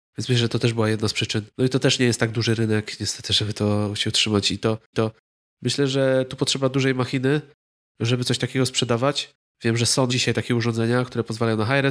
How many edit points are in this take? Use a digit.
3